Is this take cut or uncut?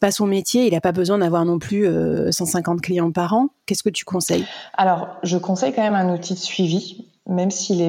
uncut